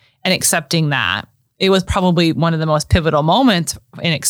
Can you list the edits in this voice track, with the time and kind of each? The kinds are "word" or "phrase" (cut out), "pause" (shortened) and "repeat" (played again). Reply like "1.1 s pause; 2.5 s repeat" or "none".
none